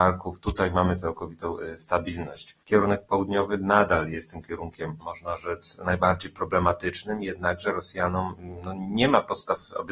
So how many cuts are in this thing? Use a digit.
1